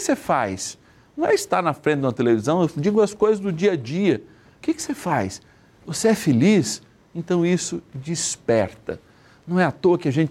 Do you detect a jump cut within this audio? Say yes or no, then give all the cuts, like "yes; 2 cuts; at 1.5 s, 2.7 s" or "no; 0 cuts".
no; 0 cuts